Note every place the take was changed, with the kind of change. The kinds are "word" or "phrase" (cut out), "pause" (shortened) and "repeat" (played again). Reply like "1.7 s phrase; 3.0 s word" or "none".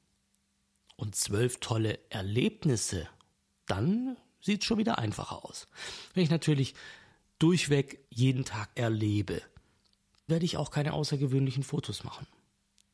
3.3 s pause; 8.0 s pause; 8.7 s phrase; 10.3 s word